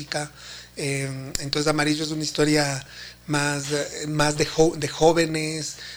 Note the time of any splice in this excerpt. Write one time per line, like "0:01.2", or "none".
none